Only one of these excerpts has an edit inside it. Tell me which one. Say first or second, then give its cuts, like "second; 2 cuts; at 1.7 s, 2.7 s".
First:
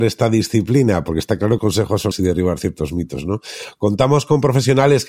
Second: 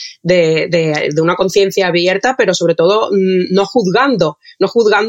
first; 2 cuts; at 1.6 s, 2.1 s